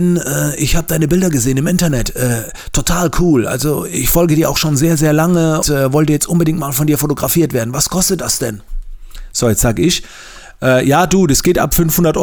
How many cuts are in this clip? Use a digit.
1